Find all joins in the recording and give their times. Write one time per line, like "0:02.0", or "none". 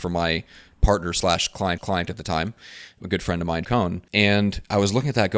0:01.8
0:03.0
0:03.6
0:04.1